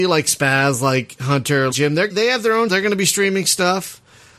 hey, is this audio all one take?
no; 3 cuts; at 1.7 s, 2.1 s, 2.7 s

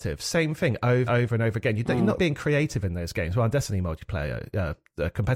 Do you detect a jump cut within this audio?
yes; 2 cuts; at 1.1 s, 2.2 s

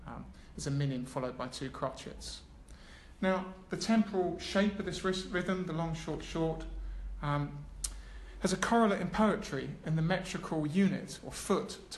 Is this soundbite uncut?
yes; 0 cuts

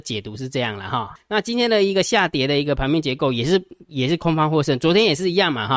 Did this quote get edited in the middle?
yes; 1 cut; at 1.2 s

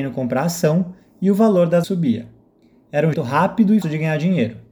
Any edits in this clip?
yes; 3 cuts; at 1.8 s, 3.1 s, 3.8 s

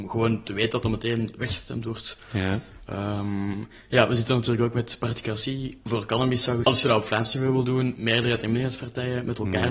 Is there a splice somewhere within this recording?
yes; 2 cuts; at 6.6 s, 8.0 s

